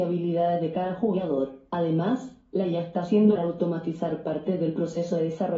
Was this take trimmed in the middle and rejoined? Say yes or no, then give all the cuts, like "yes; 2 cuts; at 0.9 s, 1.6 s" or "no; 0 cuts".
yes; 1 cut; at 3.4 s